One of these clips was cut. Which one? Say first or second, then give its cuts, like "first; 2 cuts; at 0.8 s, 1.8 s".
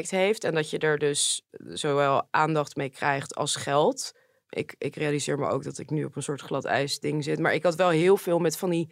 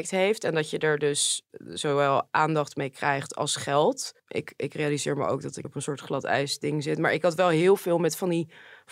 second; 2 cuts; at 4.2 s, 5.6 s